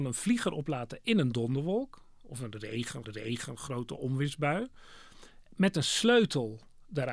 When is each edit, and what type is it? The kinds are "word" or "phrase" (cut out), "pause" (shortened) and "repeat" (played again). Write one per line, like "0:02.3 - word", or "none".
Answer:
0:03.0 - repeat